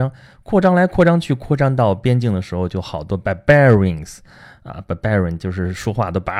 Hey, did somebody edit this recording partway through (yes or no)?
no